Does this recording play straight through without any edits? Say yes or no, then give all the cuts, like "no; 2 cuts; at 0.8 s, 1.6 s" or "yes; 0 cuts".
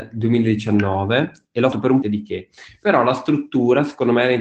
no; 2 cuts; at 1.7 s, 2.0 s